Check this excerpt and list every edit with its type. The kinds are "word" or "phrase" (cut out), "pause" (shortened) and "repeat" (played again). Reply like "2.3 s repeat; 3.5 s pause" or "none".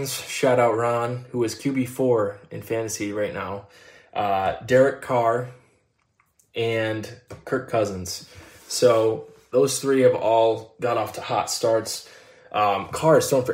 none